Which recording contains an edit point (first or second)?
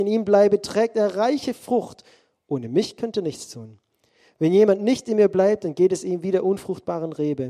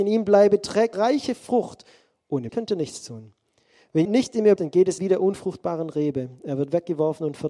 second